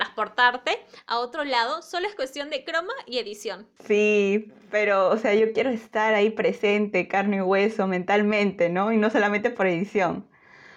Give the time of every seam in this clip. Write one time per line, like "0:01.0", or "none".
none

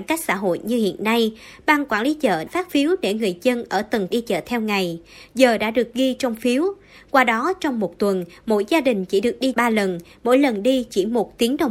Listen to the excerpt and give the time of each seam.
0:02.5
0:04.1
0:09.5

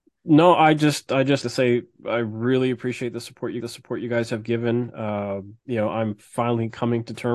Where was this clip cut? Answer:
0:01.4
0:03.6
0:05.6

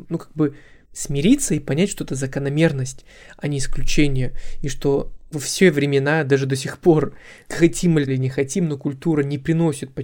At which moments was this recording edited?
0:05.3
0:08.1

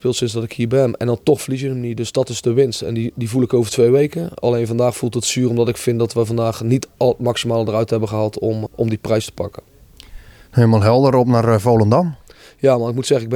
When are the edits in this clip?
0:08.7

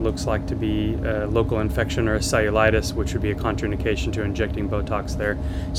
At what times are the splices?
none

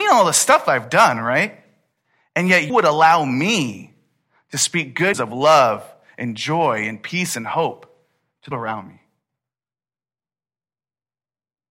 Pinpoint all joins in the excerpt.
0:02.7
0:05.1
0:08.5

